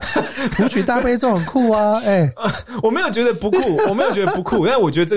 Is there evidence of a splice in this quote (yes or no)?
no